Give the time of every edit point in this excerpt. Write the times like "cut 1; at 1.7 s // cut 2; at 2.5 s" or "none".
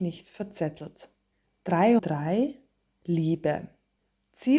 cut 1; at 2.0 s